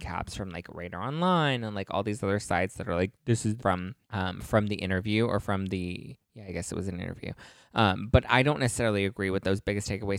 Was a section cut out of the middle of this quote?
yes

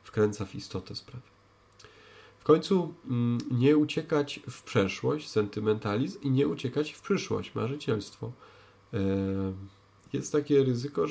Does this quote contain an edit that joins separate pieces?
no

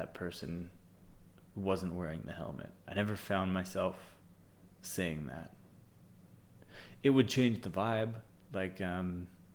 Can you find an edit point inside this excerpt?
no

